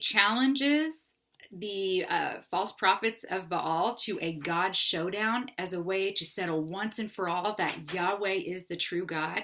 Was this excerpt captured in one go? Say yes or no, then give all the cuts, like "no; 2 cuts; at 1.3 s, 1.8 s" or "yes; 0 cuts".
yes; 0 cuts